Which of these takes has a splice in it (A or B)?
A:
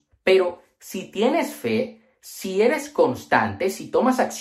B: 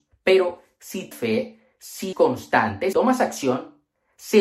B